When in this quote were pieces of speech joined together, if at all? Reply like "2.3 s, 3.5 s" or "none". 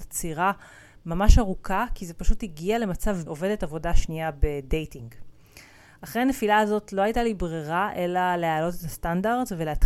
3.3 s